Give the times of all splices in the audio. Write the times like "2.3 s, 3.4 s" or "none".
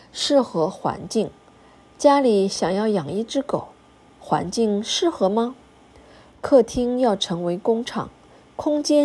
none